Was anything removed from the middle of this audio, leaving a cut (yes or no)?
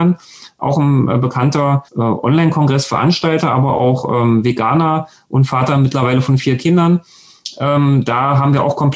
yes